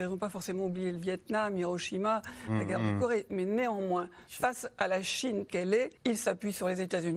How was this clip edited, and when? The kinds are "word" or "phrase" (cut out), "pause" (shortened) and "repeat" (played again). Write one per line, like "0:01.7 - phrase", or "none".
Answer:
0:05.5 - word
0:06.0 - pause